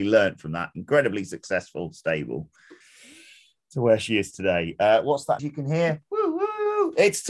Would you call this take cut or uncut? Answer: cut